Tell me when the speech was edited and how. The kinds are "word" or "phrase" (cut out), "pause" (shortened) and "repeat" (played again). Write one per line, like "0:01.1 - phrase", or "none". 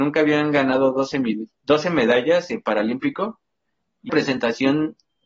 0:04.1 - phrase